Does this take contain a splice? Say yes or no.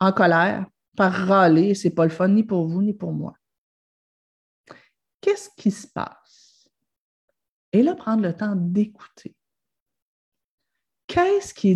no